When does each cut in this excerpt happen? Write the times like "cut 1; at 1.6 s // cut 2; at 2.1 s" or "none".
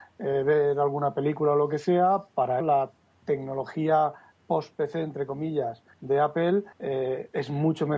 cut 1; at 2.6 s // cut 2; at 5.9 s // cut 3; at 6.7 s